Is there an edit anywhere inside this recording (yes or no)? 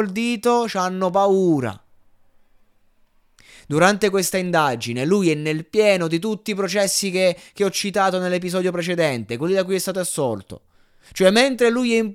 no